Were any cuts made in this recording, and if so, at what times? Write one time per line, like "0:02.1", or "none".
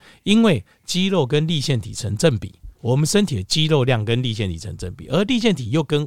0:02.7